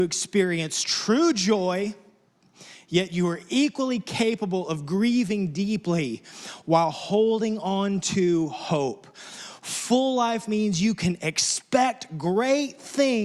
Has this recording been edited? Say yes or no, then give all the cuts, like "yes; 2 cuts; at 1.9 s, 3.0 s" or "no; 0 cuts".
no; 0 cuts